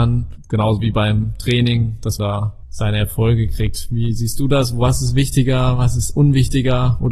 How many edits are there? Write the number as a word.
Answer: one